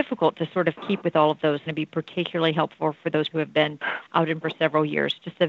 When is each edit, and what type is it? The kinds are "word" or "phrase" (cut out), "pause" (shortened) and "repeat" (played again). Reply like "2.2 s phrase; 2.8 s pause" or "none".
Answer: 1.0 s word; 1.7 s phrase; 3.3 s word; 4.4 s word